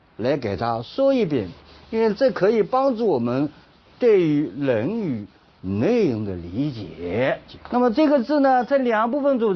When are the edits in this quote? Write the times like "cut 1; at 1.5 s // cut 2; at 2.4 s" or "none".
cut 1; at 7.6 s